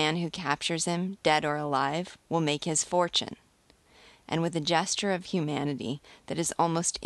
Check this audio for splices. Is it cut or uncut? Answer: uncut